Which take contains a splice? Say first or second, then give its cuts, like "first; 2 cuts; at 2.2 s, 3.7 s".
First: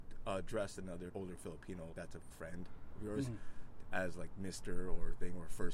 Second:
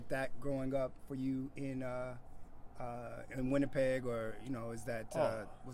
first; 3 cuts; at 1.1 s, 1.9 s, 2.3 s